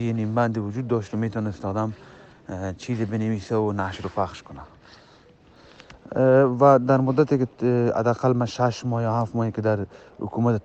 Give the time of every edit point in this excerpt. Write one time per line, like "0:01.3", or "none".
none